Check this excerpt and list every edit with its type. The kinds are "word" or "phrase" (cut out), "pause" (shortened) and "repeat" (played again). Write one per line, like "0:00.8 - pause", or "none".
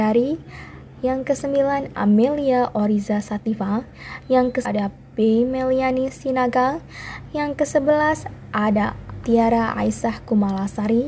0:01.9 - word
0:04.6 - word
0:09.2 - word